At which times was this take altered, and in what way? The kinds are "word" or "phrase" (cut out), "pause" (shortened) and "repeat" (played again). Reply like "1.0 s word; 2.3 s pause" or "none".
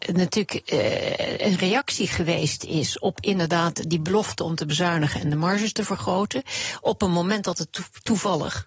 none